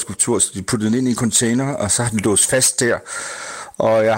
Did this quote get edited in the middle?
no; 0 cuts

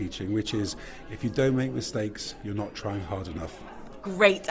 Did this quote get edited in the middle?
no; 0 cuts

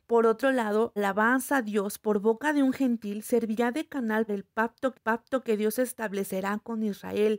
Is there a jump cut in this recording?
yes; 3 cuts; at 1.0 s, 4.3 s, 4.9 s

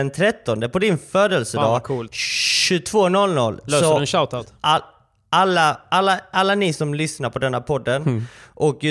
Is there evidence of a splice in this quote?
no; 0 cuts

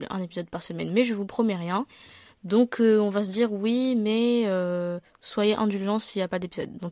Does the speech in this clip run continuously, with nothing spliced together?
yes; 0 cuts

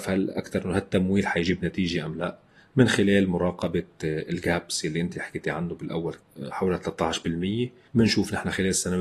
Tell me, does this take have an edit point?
no; 0 cuts

